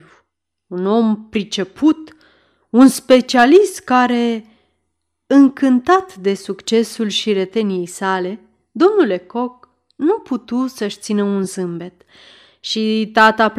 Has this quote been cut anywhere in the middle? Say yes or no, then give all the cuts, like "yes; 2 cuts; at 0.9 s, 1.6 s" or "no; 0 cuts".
no; 0 cuts